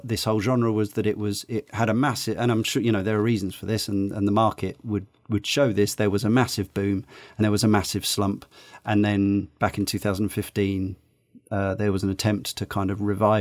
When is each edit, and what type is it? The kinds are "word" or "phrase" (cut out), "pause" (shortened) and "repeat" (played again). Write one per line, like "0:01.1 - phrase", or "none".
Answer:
0:07.4 - word